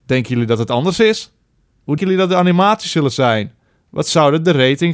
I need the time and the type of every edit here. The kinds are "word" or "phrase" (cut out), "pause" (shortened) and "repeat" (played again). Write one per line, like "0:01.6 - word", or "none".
0:02.0 - word